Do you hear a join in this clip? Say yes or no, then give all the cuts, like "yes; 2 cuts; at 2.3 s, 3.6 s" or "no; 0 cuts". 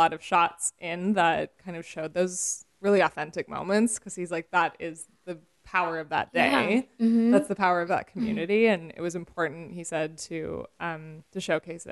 no; 0 cuts